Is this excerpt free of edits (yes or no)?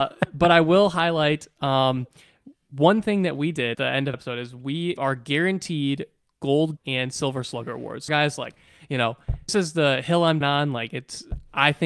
no